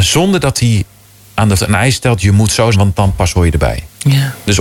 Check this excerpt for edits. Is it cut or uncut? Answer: cut